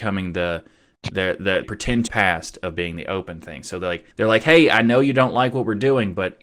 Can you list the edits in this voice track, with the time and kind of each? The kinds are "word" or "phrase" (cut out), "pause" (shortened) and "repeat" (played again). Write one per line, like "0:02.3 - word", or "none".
0:01.6 - phrase
0:02.1 - phrase
0:04.1 - pause